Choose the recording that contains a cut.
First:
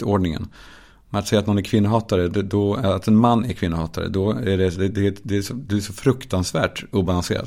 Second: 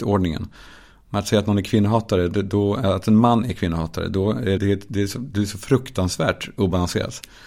second; 1 cut; at 4.6 s

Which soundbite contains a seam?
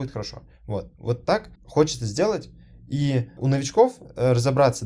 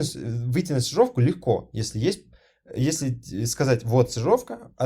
first; 2 cuts; at 1.5 s, 3.4 s

